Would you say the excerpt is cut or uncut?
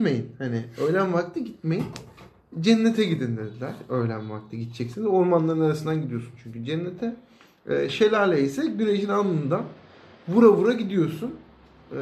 uncut